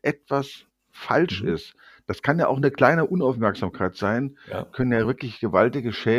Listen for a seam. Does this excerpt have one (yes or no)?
no